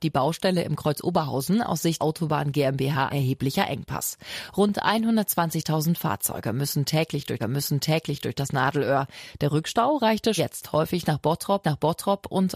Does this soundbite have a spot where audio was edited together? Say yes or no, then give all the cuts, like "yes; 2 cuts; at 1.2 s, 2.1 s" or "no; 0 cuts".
yes; 5 cuts; at 2.0 s, 3.1 s, 7.4 s, 10.4 s, 11.6 s